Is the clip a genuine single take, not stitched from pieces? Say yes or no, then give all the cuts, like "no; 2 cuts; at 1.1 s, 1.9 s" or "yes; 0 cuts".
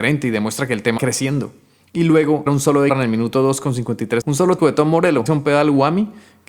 no; 6 cuts; at 1.0 s, 2.5 s, 2.9 s, 4.2 s, 4.6 s, 5.3 s